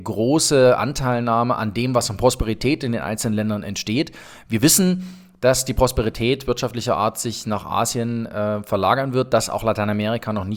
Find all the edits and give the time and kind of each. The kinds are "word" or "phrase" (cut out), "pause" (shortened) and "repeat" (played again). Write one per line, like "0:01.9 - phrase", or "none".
none